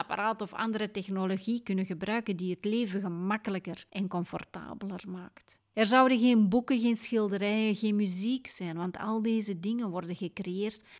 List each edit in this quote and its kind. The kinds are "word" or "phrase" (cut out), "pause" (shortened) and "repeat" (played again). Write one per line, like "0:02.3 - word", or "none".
none